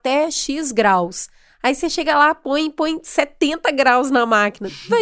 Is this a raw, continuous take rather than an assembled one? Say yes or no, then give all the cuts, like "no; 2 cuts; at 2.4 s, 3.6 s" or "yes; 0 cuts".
yes; 0 cuts